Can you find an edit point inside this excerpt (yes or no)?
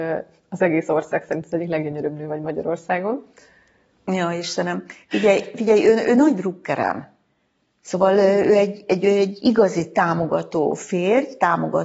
no